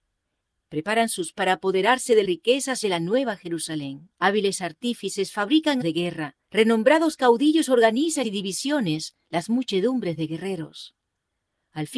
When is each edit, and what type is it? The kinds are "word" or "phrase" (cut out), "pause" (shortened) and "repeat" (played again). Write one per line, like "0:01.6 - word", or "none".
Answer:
0:01.3 - word
0:02.2 - word
0:02.8 - phrase
0:04.1 - pause
0:05.8 - word
0:06.4 - pause
0:08.2 - phrase
0:09.2 - pause